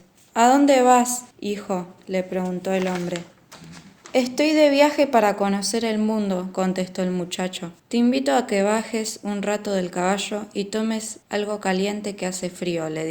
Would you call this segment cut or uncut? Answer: cut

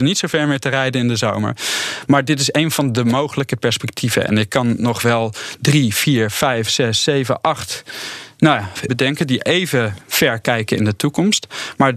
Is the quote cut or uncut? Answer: cut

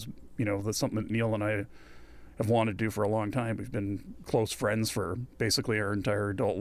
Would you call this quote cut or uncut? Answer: uncut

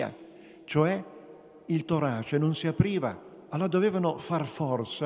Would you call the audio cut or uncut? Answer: uncut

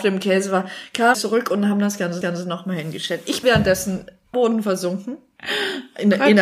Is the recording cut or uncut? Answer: cut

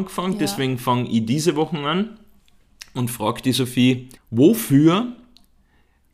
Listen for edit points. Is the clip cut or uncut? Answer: cut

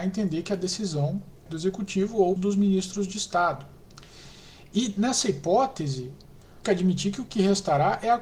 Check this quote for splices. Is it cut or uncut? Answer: cut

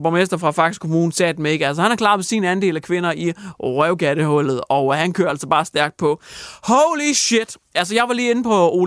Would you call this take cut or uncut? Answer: uncut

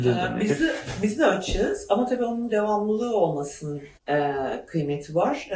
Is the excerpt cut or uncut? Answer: cut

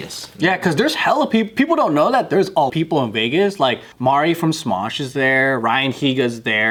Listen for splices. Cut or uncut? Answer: cut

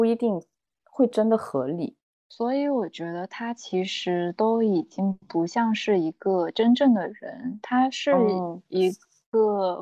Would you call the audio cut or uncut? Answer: cut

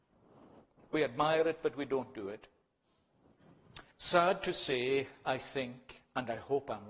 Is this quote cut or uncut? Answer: cut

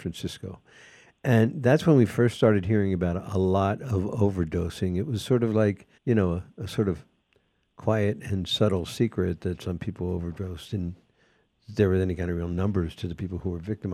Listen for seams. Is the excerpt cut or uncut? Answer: cut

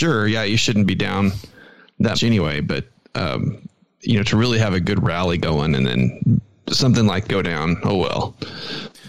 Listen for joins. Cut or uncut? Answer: cut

